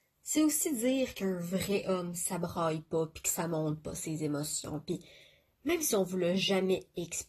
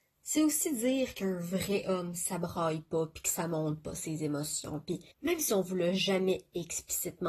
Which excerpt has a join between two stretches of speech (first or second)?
second